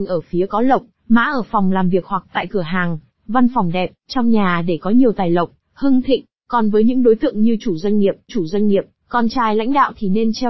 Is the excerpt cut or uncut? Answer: cut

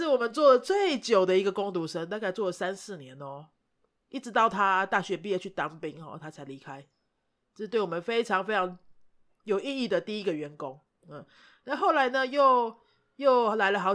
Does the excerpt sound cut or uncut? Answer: uncut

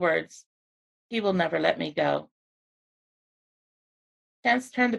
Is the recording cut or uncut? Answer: uncut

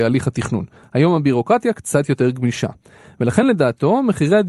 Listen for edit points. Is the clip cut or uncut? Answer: uncut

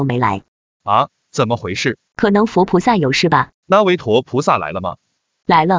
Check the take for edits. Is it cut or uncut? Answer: cut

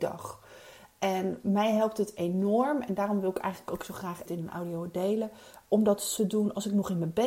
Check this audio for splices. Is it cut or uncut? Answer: cut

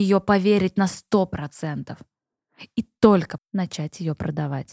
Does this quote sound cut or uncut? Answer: cut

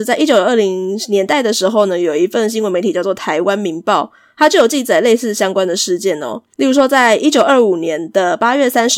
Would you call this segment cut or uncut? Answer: cut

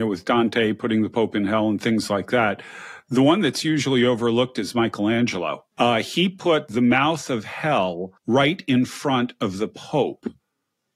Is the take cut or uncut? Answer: cut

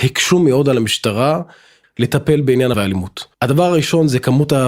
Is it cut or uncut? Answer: cut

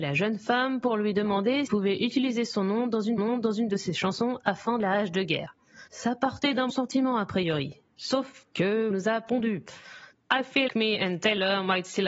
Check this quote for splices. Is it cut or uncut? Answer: cut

